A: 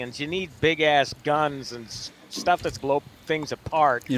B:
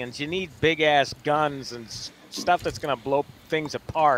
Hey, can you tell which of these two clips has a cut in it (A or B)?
A